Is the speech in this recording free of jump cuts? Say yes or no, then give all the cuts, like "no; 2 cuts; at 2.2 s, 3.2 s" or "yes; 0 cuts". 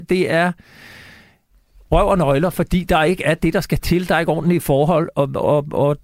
yes; 0 cuts